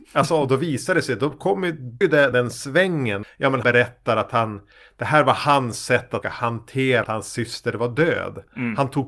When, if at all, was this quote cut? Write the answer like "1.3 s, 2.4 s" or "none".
2.0 s, 2.3 s, 3.2 s, 3.6 s, 6.2 s, 7.0 s